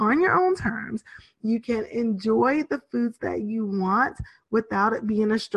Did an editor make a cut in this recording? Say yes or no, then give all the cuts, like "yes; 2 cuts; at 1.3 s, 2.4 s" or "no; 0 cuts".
no; 0 cuts